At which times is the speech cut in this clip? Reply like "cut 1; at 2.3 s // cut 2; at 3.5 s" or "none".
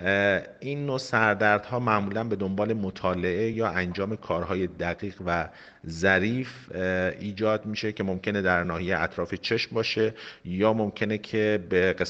none